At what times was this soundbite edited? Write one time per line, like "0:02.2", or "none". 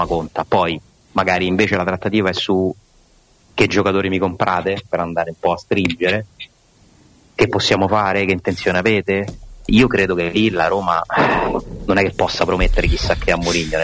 0:09.7